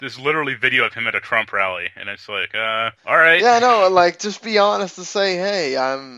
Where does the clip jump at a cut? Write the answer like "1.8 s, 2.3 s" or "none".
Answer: 3.0 s